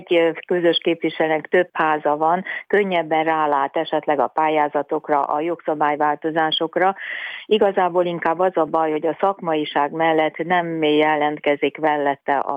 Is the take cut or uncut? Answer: uncut